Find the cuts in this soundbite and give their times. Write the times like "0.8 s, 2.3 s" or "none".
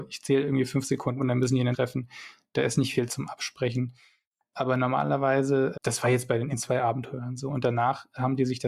1.2 s, 1.7 s, 3.1 s, 5.7 s, 6.5 s